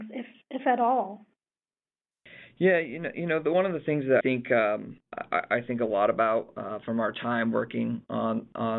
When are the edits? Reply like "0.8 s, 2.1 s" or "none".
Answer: 4.2 s